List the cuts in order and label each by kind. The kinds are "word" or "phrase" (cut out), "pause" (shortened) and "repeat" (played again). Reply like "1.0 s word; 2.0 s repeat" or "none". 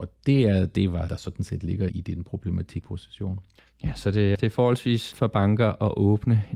1.1 s word; 1.9 s word; 2.8 s word; 4.4 s word; 5.1 s word